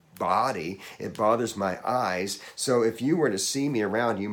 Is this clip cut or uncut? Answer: uncut